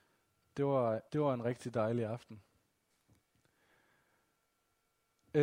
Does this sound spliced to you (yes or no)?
yes